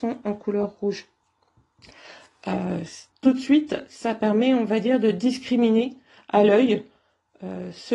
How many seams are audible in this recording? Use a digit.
1